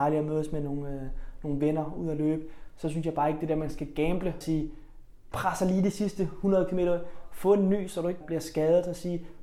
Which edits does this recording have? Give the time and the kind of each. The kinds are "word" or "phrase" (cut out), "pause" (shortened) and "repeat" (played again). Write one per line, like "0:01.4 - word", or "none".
0:04.4 - word
0:05.3 - word
0:08.2 - word